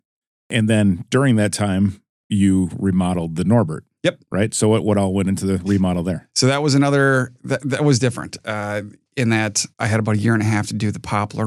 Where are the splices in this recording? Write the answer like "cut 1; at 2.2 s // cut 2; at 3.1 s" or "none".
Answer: cut 1; at 9.7 s